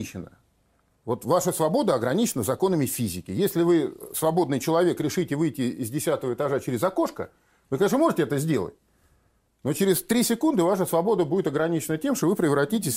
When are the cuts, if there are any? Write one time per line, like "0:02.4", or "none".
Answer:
none

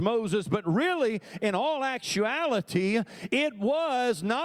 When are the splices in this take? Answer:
none

